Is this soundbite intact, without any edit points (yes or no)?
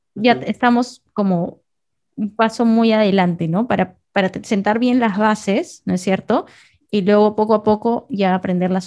yes